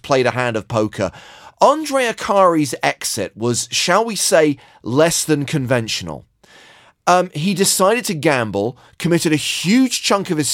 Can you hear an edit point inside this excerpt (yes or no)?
no